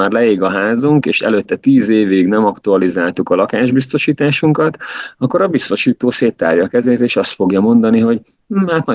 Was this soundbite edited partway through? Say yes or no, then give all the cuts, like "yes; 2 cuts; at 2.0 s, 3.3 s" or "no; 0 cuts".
no; 0 cuts